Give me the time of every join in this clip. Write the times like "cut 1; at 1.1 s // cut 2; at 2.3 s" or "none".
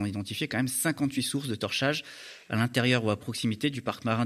none